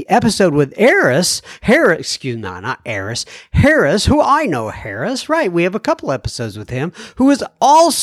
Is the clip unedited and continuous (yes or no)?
yes